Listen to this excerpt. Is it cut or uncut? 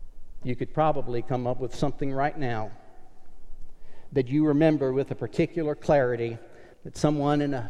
cut